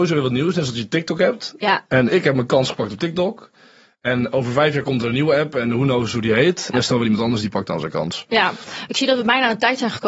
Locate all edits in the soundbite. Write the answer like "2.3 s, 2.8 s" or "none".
6.7 s